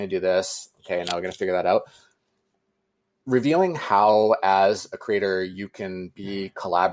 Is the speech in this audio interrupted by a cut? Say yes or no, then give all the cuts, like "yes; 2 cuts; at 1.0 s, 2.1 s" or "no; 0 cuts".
no; 0 cuts